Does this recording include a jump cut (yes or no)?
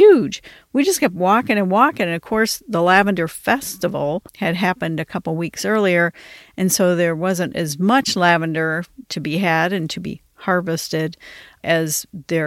yes